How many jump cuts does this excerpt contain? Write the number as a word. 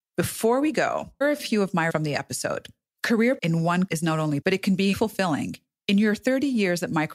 six